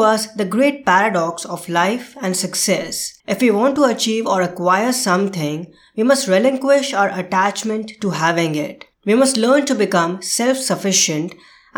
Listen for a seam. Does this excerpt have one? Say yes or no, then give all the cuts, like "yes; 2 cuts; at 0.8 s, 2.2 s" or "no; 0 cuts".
yes; 2 cuts; at 3.2 s, 8.9 s